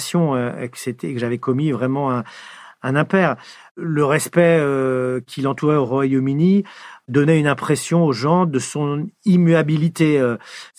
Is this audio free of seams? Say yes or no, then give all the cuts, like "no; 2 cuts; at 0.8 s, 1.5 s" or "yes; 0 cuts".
yes; 0 cuts